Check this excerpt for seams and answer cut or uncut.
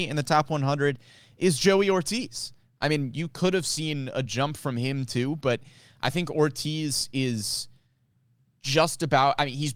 uncut